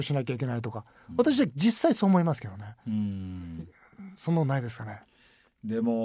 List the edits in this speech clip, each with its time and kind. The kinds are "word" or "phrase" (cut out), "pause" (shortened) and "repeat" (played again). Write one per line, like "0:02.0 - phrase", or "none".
none